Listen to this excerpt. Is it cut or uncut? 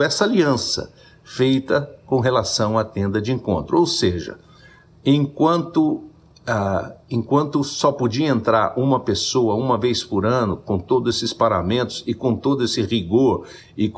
uncut